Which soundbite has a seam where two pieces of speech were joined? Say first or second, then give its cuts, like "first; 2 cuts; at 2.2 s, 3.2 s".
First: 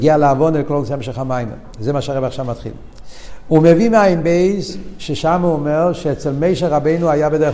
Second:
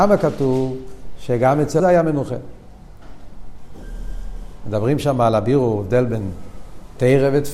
second; 1 cut; at 1.8 s